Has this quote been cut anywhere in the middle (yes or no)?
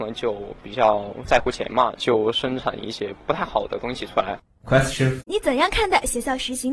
yes